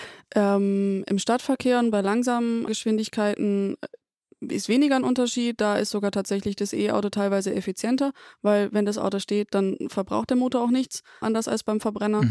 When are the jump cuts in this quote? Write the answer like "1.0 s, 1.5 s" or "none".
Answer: 2.7 s, 11.2 s